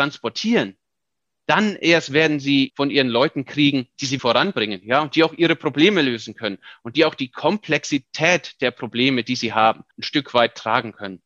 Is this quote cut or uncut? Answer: cut